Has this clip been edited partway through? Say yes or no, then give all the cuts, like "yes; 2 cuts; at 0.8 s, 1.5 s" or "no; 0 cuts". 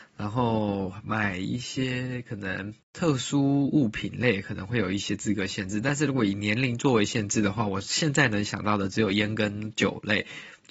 yes; 1 cut; at 2.8 s